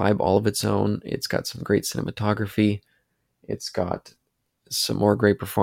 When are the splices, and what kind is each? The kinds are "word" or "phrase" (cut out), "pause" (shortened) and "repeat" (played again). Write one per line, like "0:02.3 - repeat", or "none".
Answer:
none